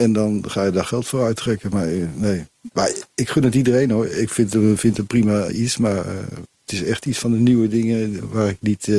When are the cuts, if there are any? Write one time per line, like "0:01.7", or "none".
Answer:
0:02.7

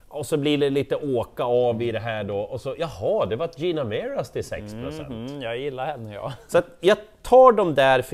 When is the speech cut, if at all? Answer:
none

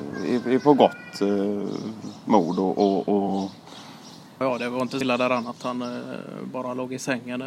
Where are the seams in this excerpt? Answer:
0:04.4
0:05.0

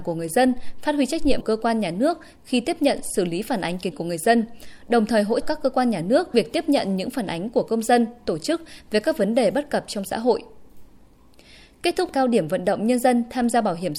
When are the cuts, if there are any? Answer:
0:01.4
0:03.9
0:05.4
0:06.3
0:12.1

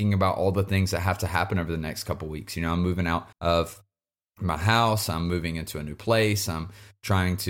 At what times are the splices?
0:03.3

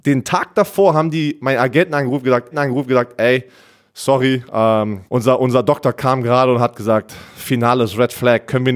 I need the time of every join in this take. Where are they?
0:02.5
0:05.1

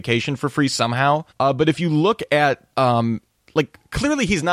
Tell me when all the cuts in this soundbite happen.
0:01.3
0:02.7

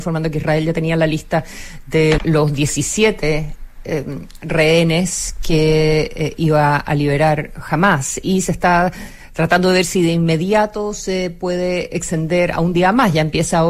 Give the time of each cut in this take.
0:02.2

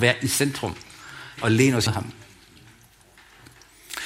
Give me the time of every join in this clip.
0:01.4
0:01.9

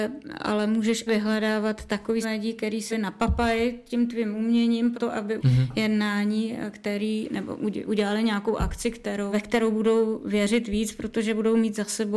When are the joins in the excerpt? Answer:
0:01.1
0:02.2
0:02.9
0:04.9
0:05.4
0:09.3

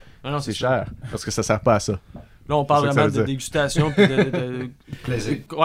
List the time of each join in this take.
none

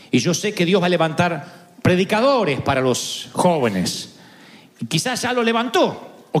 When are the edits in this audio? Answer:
none

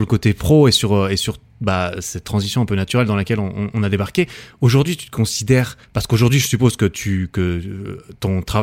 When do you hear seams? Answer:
0:05.8

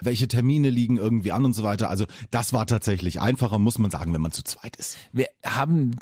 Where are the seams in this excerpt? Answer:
none

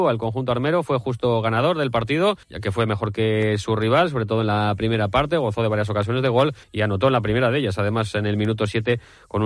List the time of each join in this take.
0:02.4
0:06.6

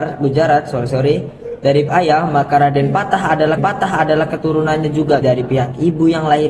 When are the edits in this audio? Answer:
0:01.9
0:03.6
0:05.2

